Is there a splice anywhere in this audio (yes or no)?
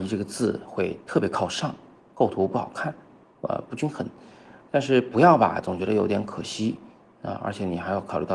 no